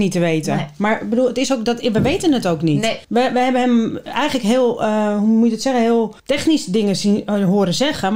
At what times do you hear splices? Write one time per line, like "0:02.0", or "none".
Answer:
0:03.0
0:06.2